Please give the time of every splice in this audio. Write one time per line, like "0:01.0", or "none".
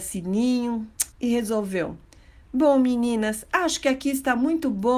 0:01.1